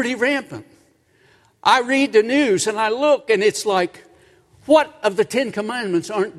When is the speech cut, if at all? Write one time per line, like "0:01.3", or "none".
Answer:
none

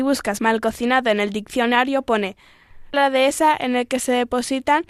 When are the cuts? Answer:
0:02.9

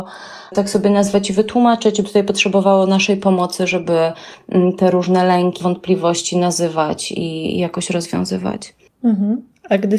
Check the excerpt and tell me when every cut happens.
0:02.0
0:05.6

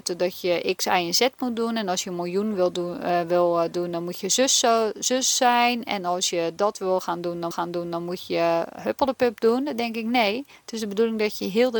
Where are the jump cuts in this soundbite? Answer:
0:07.5

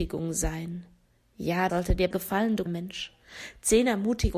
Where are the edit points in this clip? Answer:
0:01.7
0:02.1
0:02.7

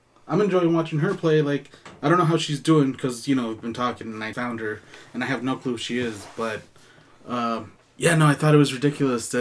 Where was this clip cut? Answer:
0:04.3
0:07.8

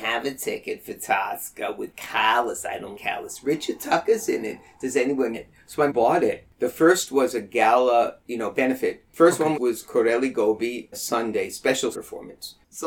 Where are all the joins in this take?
0:02.9
0:05.3
0:05.9
0:09.5
0:10.9
0:11.9

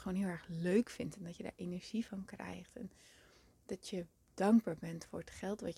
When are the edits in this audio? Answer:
none

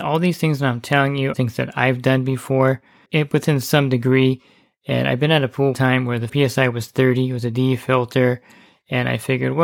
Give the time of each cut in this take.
0:01.3
0:03.1
0:05.7
0:06.3

